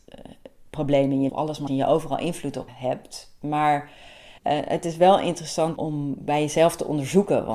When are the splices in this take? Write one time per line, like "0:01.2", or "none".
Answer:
0:01.3
0:01.7
0:02.7
0:04.4
0:05.8